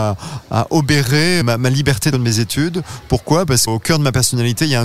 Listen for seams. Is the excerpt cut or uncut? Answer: cut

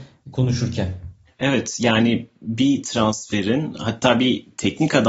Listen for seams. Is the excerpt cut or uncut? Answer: uncut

